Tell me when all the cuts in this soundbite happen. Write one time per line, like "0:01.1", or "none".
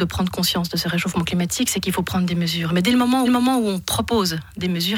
0:03.2